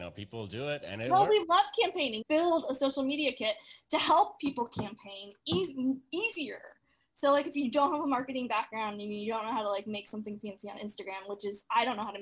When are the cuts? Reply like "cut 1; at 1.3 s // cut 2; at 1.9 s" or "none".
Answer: cut 1; at 2.2 s